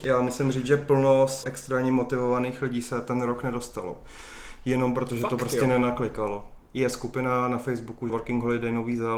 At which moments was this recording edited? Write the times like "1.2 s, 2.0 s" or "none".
1.4 s, 8.1 s